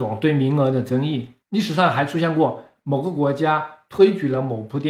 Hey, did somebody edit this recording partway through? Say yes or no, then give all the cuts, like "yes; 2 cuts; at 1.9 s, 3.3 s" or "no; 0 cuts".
yes; 1 cut; at 1.4 s